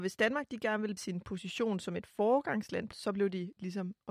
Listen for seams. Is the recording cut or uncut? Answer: cut